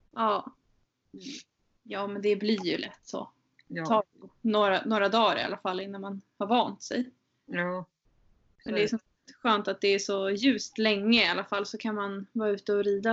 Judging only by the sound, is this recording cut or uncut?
uncut